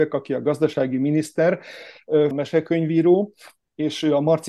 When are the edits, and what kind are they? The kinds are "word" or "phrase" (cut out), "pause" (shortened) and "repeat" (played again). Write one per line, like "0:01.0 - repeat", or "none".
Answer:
0:02.3 - word